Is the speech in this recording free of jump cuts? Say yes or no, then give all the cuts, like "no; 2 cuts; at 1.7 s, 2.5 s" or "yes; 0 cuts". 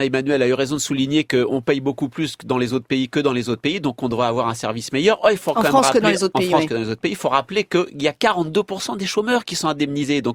yes; 0 cuts